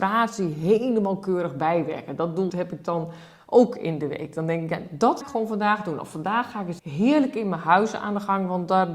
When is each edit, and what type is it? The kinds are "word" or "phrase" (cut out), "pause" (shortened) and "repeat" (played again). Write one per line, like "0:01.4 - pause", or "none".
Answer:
0:02.5 - word
0:05.2 - word
0:06.8 - word